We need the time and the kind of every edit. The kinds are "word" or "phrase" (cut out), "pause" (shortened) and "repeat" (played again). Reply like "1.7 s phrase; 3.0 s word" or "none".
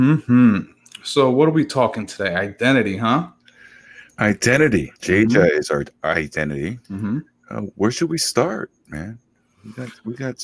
5.0 s pause; 6.8 s pause